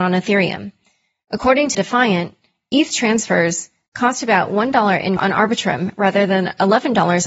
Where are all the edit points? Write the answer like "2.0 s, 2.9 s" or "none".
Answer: 1.7 s, 5.2 s